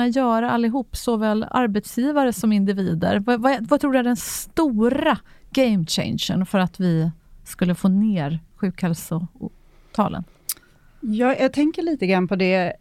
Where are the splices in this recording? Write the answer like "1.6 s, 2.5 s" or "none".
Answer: none